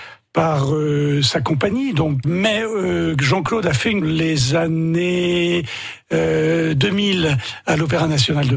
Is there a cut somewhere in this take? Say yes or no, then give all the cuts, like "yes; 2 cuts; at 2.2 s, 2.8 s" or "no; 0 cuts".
yes; 2 cuts; at 2.2 s, 4.0 s